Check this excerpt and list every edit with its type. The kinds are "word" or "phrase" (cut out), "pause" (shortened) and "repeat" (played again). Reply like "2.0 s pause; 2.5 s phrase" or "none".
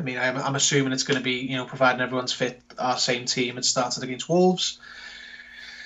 none